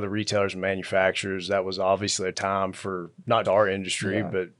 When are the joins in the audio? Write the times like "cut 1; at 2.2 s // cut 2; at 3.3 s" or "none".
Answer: cut 1; at 2.3 s // cut 2; at 3.4 s